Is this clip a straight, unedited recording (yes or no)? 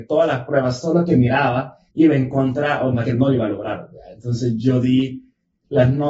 no